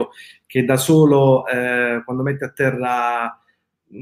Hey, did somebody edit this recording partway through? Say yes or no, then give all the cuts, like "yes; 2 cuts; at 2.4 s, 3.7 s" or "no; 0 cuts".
no; 0 cuts